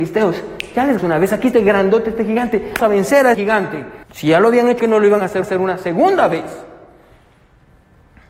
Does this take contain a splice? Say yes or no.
yes